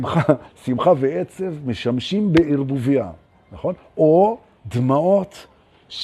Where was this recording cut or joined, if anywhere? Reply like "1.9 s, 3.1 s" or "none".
none

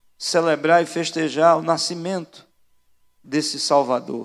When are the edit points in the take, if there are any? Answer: none

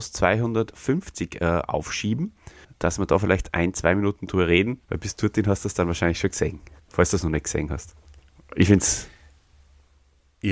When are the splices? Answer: 2.6 s, 4.8 s, 6.8 s, 8.2 s

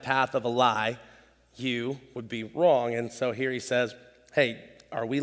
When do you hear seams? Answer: none

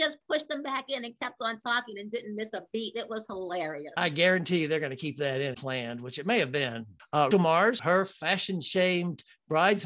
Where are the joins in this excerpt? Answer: 5.5 s, 7.3 s

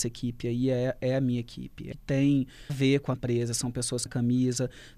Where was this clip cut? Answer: 1.9 s, 2.7 s, 3.1 s, 4.1 s

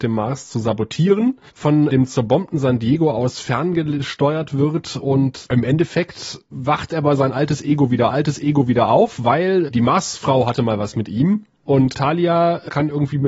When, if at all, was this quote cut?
1.5 s, 8.1 s, 9.7 s, 11.9 s

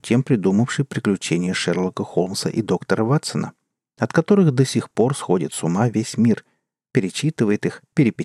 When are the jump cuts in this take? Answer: none

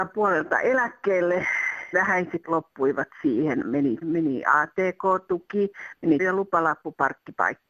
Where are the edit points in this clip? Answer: 1.9 s, 2.4 s, 4.0 s, 6.2 s

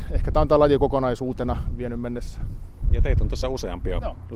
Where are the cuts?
none

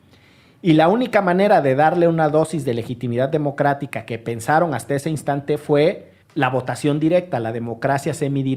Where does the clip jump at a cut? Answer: 6.2 s

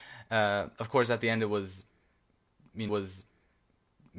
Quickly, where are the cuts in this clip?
2.9 s

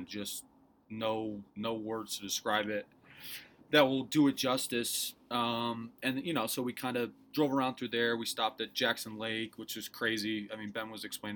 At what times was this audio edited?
1.5 s

